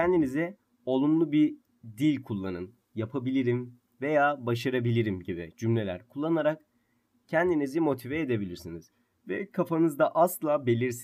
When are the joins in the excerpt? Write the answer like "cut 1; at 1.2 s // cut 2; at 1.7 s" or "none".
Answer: none